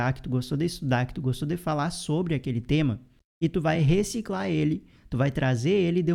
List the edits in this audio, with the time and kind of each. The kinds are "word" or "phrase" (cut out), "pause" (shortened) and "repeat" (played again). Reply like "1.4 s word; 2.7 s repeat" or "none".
none